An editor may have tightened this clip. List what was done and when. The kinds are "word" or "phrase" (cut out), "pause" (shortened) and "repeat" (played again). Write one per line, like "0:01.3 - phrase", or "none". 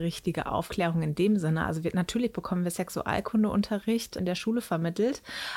0:04.2 - word